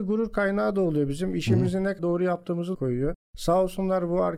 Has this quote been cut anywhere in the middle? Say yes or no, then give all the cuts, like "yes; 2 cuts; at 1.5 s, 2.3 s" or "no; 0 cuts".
yes; 2 cuts; at 2.0 s, 2.7 s